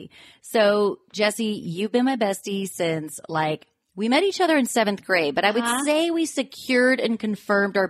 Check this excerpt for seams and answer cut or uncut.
uncut